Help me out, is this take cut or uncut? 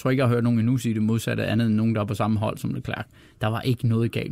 uncut